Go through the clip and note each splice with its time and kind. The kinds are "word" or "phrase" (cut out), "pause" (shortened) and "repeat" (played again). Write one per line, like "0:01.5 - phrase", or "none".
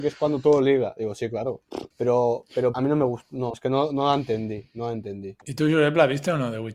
0:01.9 - pause
0:02.7 - phrase
0:03.5 - word
0:05.4 - pause